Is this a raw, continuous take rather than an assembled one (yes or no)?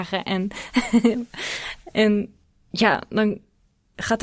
yes